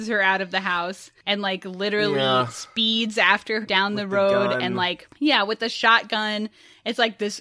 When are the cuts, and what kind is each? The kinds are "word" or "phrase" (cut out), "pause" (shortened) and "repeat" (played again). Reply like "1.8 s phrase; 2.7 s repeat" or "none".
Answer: 3.6 s word

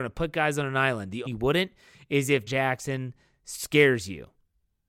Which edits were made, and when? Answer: 1.3 s phrase; 2.5 s word

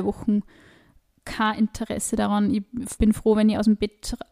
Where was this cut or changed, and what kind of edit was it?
3.0 s word

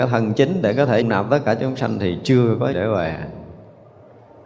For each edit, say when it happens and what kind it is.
1.0 s word; 2.7 s word

